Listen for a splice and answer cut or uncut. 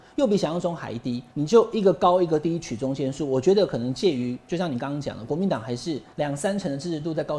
cut